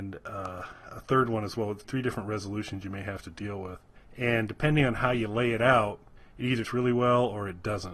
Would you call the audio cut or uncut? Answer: cut